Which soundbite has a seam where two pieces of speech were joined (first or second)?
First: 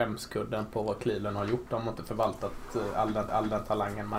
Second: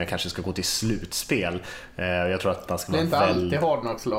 first